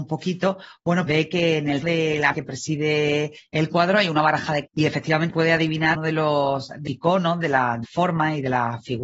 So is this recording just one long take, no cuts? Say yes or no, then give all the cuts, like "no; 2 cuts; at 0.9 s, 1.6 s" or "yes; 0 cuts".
no; 8 cuts; at 1.1 s, 1.8 s, 2.3 s, 4.7 s, 5.3 s, 5.9 s, 6.9 s, 7.8 s